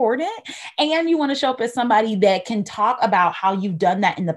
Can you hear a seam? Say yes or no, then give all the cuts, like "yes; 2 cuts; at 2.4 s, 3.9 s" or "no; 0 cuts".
no; 0 cuts